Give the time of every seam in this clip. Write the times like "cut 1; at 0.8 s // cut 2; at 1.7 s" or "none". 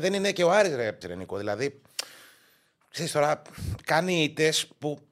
cut 1; at 1.0 s